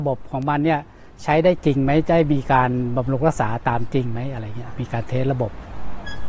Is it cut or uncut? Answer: uncut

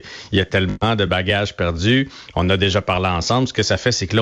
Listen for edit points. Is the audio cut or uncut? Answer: uncut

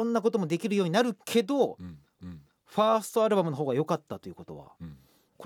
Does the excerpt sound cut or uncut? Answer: cut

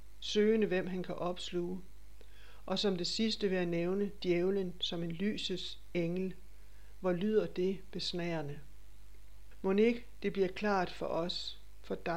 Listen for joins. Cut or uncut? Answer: uncut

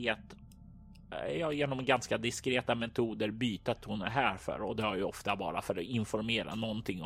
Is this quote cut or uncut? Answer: cut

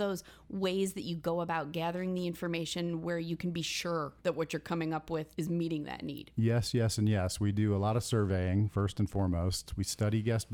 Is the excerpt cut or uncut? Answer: cut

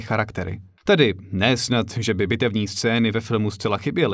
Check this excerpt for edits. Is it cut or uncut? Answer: uncut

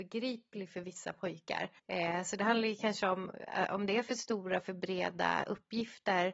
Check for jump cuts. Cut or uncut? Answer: cut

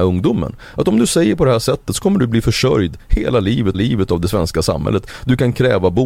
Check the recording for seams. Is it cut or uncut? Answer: cut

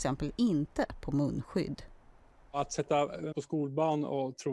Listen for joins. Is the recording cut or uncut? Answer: cut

